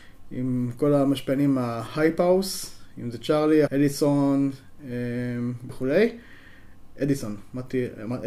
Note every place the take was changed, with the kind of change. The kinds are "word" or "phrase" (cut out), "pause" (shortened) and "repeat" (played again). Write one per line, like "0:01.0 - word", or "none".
0:03.7 - word
0:05.7 - word